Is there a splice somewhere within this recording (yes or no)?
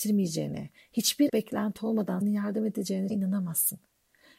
yes